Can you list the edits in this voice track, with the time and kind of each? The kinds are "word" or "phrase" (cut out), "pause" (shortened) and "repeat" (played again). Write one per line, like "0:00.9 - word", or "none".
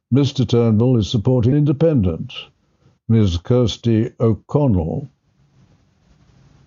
0:01.5 - word